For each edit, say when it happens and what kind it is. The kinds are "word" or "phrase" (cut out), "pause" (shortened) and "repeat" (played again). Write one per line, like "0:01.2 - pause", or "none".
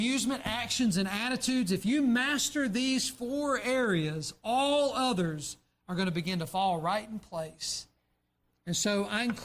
none